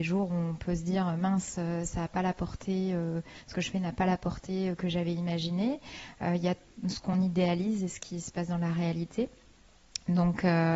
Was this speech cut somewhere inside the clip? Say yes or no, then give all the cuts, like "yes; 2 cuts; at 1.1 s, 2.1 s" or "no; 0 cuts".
no; 0 cuts